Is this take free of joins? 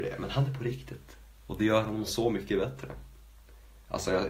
yes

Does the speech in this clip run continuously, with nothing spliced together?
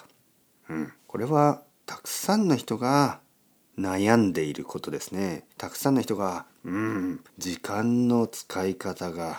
no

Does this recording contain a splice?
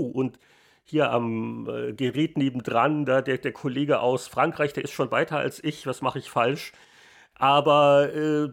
no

